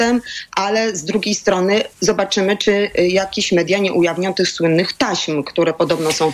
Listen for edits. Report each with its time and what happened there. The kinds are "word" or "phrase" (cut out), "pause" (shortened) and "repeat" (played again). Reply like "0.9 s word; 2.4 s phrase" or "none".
1.9 s pause